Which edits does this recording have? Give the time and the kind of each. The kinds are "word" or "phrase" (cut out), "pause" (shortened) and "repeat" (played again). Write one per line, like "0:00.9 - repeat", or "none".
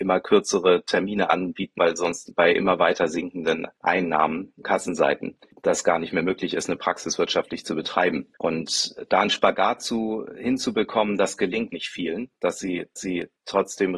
0:01.8 - word
0:04.6 - word
0:08.3 - pause
0:11.7 - word
0:13.0 - repeat